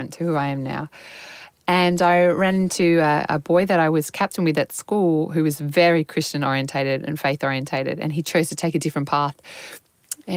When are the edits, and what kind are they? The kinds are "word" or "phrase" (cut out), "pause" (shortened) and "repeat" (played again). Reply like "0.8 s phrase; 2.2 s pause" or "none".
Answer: none